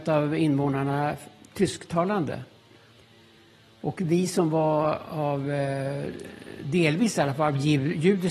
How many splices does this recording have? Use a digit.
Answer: 0